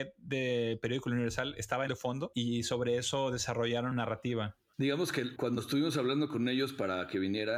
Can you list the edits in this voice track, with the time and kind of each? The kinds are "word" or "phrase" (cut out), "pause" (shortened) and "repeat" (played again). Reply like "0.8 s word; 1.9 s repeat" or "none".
1.9 s word; 3.9 s word

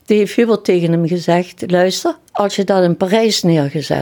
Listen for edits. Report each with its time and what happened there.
2.3 s pause

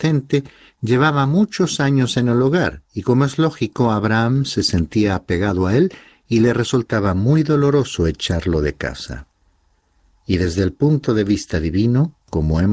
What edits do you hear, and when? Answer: none

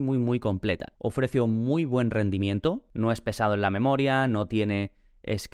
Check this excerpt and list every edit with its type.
0.9 s pause

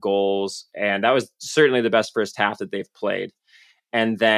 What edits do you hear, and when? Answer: none

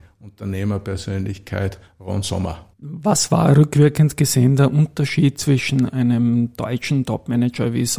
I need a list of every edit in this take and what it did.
2.7 s pause

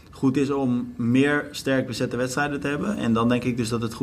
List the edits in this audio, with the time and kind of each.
none

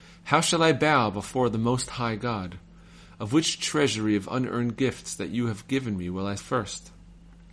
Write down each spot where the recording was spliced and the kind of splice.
6.4 s word

